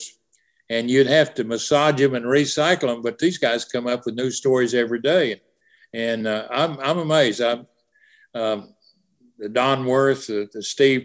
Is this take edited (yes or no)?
no